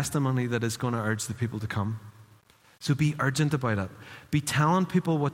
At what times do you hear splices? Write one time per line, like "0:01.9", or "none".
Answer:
none